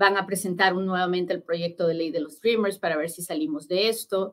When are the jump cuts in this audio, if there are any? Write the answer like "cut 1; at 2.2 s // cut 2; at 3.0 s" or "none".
none